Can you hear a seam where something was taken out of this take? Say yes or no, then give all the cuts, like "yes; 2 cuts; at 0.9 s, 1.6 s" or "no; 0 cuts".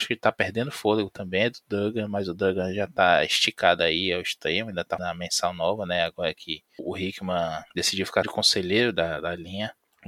yes; 3 cuts; at 5.0 s, 7.7 s, 8.2 s